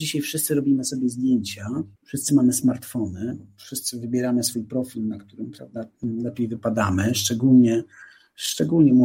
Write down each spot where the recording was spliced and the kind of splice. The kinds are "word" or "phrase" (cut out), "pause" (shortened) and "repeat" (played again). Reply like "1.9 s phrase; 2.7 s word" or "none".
2.0 s pause